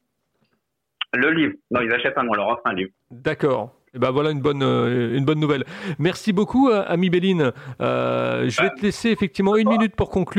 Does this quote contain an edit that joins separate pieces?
yes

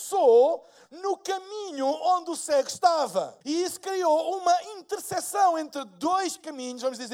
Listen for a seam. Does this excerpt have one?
yes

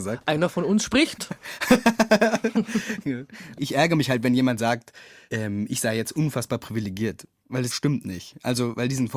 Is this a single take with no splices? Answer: yes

